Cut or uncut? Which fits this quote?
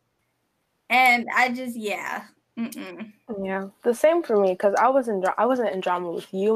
uncut